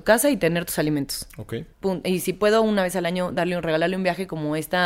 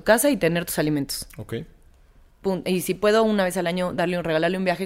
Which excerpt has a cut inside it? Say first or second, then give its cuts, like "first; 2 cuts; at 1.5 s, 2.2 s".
first; 1 cut; at 1.7 s